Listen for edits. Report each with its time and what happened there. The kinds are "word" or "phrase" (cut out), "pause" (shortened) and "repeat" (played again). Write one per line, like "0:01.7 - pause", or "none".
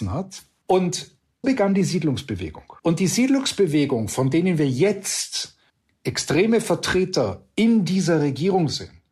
0:01.4 - word
0:02.8 - pause
0:05.7 - pause